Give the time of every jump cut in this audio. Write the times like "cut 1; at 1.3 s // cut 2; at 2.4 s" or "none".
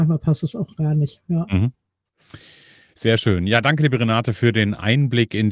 none